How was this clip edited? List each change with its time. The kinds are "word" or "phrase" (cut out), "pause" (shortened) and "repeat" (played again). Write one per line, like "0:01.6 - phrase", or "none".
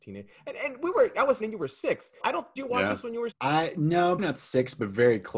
0:01.4 - word
0:02.2 - word
0:02.6 - word
0:03.3 - word
0:04.2 - word